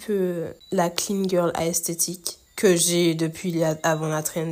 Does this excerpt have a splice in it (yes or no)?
yes